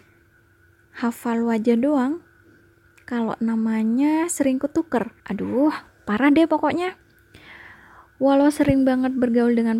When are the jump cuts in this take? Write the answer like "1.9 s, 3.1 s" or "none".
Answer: 5.2 s